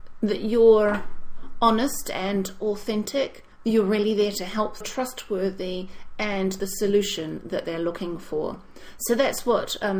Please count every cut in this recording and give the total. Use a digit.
3